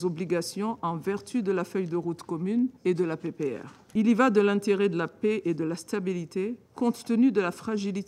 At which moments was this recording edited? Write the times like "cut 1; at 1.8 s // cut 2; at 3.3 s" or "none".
cut 1; at 2.8 s